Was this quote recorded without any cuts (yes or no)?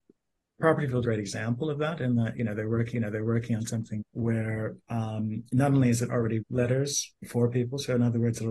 no